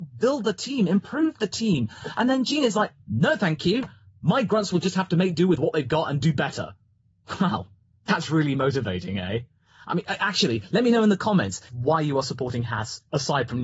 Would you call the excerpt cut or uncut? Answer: uncut